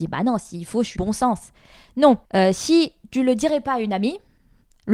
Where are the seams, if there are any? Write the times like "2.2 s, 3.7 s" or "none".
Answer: 1.0 s, 2.2 s